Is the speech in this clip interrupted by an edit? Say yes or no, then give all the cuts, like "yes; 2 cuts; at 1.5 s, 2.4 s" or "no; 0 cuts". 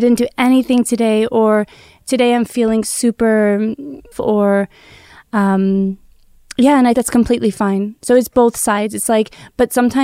yes; 2 cuts; at 4.1 s, 6.9 s